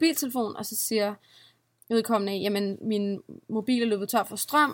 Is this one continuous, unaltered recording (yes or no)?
yes